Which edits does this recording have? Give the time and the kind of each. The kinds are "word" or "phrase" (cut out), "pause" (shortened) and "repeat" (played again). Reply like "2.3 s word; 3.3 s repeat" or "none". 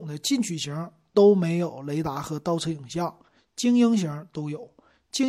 none